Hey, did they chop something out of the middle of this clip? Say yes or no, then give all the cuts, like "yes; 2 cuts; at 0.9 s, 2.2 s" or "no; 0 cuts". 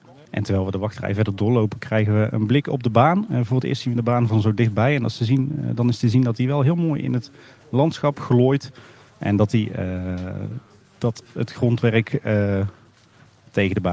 no; 0 cuts